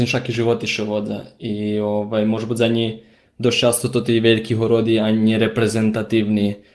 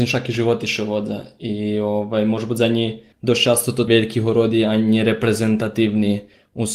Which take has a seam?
second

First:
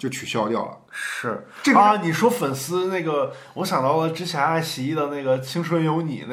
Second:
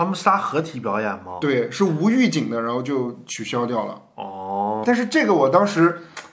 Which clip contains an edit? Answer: second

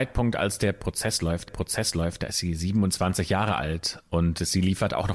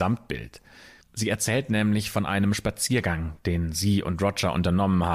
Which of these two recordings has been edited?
first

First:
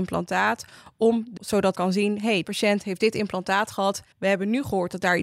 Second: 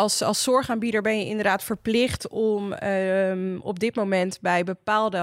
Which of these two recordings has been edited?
first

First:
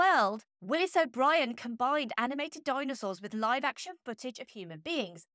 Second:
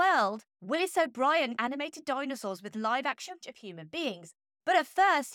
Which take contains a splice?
second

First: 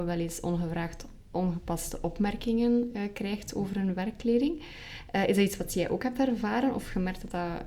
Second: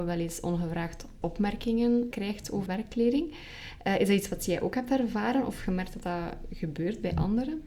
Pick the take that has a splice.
second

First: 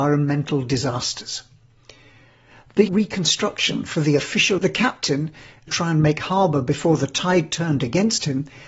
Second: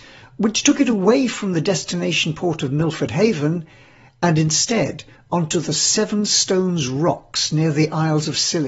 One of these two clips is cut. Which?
first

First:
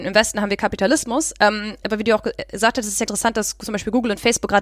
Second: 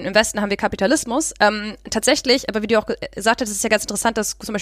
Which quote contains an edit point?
first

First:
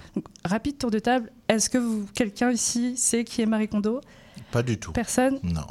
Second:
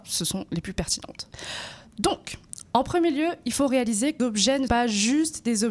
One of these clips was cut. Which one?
second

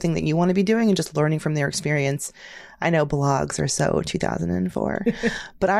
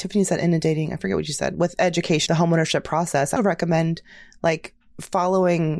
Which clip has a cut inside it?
second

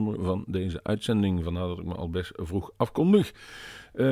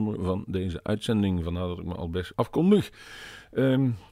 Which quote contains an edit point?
second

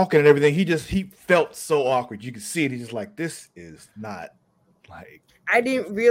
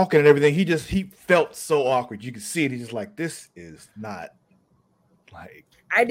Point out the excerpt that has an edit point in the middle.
first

